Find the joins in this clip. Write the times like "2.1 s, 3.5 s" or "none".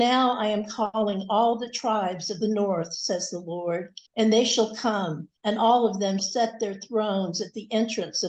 2.4 s, 4.1 s, 5.4 s, 6.2 s